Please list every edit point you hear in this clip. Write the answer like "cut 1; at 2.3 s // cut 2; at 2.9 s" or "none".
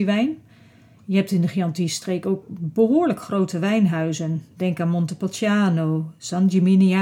none